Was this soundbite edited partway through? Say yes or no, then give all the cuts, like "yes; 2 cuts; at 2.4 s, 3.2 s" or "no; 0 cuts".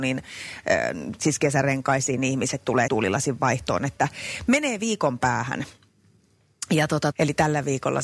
yes; 2 cuts; at 2.9 s, 7.1 s